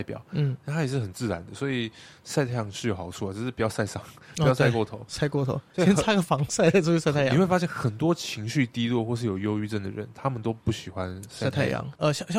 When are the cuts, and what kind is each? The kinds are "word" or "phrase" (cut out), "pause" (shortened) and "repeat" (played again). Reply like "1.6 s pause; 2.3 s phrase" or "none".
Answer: none